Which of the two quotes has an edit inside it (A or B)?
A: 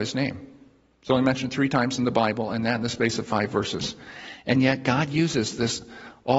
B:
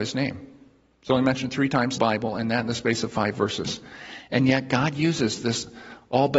B